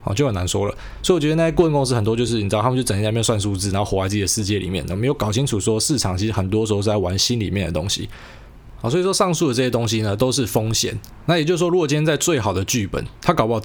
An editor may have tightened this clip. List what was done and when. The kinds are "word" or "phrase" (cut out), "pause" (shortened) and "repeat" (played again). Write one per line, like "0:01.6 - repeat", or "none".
none